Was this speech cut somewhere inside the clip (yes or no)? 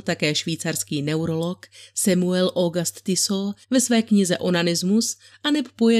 yes